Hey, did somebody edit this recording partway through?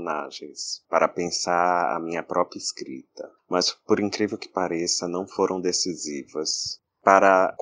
no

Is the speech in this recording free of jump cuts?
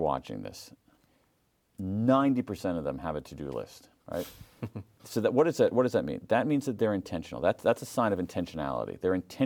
no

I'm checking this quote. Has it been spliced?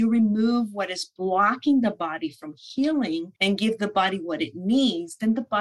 yes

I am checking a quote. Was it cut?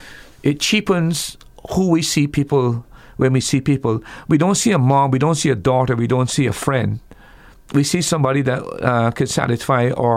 no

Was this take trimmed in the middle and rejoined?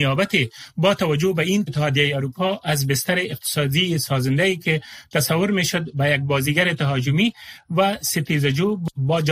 yes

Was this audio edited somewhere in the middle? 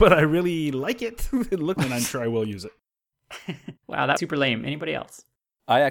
yes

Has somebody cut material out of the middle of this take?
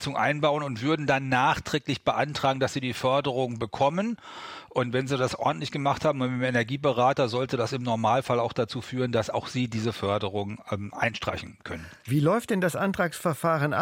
yes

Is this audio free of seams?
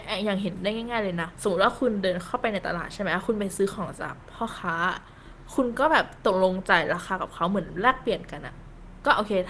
no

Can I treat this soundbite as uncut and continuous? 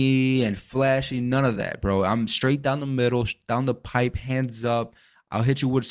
yes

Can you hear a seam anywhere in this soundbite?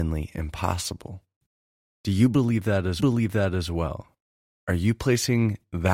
yes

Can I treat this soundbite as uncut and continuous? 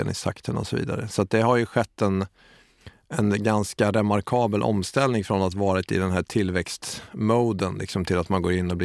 yes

